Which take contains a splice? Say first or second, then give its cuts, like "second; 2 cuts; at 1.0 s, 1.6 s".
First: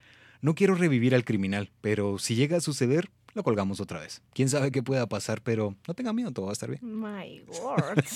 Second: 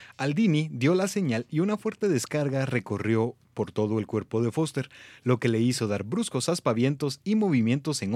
first; 1 cut; at 4.3 s